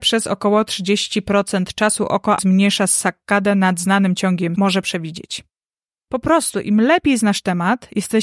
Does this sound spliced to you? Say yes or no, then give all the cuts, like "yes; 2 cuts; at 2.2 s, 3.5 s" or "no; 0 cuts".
yes; 2 cuts; at 2.4 s, 4.6 s